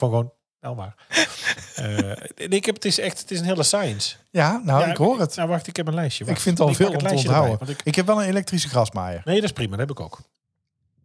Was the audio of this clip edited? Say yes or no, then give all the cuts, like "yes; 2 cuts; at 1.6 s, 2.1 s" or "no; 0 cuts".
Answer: no; 0 cuts